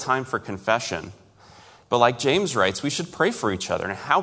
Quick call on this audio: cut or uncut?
uncut